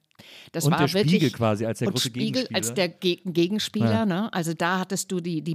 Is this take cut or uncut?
uncut